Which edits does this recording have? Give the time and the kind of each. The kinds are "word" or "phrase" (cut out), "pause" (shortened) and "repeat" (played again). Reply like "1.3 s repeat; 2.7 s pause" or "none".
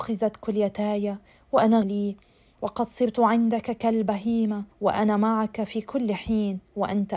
1.8 s phrase; 4.7 s pause